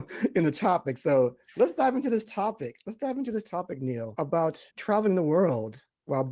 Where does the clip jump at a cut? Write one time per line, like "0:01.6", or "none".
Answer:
0:04.7